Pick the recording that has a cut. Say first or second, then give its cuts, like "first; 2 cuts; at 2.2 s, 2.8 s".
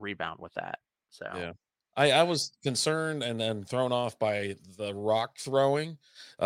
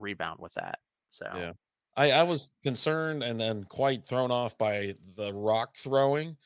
first; 1 cut; at 3.6 s